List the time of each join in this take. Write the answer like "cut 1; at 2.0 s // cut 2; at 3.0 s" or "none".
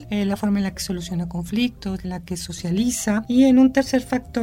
cut 1; at 2.0 s